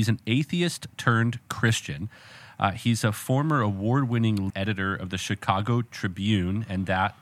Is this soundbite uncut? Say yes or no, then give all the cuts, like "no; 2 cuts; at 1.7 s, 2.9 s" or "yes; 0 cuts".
no; 1 cut; at 4.5 s